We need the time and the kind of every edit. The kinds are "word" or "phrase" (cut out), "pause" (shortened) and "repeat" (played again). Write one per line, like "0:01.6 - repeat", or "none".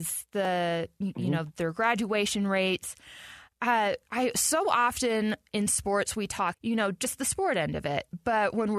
0:06.5 - word